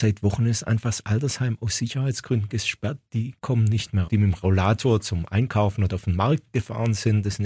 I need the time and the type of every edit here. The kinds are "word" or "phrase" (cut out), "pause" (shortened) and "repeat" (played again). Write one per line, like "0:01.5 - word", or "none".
0:03.4 - pause
0:04.1 - word

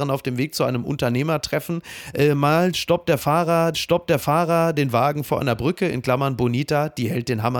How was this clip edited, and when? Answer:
0:03.7 - repeat

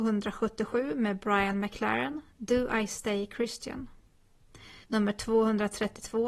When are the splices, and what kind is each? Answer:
0:04.8 - pause

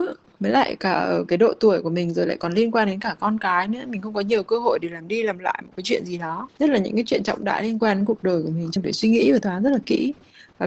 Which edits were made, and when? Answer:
0:08.8 - word
0:09.4 - word

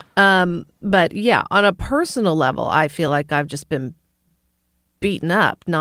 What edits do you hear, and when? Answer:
none

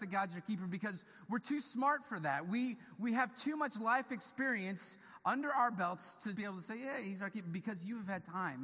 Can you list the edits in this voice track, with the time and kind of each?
0:06.3 - word

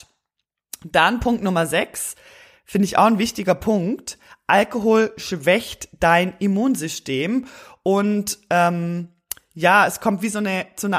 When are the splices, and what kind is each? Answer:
none

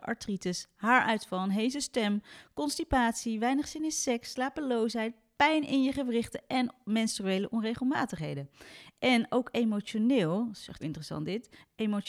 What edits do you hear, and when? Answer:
0:10.8 - word

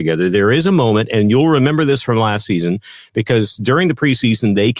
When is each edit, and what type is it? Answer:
none

